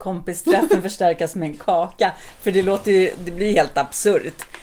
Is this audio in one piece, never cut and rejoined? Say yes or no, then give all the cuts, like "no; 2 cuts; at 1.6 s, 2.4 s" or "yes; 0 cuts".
yes; 0 cuts